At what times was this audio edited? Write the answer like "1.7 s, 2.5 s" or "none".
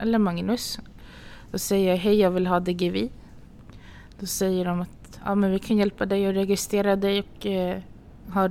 none